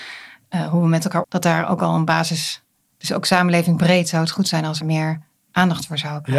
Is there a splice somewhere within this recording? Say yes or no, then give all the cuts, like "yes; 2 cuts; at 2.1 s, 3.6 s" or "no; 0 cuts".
yes; 2 cuts; at 1.2 s, 4.8 s